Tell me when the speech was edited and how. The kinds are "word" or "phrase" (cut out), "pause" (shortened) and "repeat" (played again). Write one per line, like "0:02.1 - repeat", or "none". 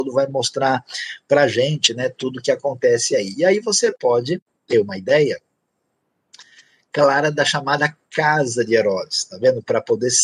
none